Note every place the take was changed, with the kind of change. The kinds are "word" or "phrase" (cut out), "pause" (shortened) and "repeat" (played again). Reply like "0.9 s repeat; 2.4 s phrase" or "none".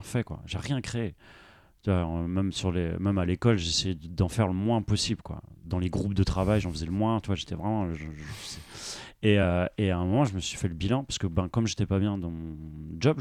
none